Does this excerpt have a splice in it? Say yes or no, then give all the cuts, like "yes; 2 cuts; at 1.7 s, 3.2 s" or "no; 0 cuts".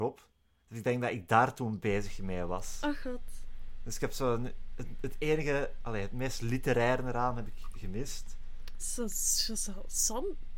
no; 0 cuts